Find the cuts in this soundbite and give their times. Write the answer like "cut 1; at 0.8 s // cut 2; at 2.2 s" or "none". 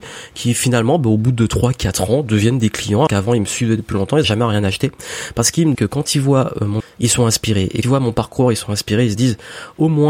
cut 1; at 3.1 s // cut 2; at 4.2 s // cut 3; at 5.7 s // cut 4; at 6.8 s // cut 5; at 7.8 s